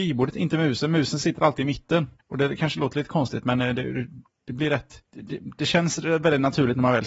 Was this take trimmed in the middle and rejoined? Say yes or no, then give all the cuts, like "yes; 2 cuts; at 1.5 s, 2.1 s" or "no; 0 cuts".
yes; 2 cuts; at 2.2 s, 5.1 s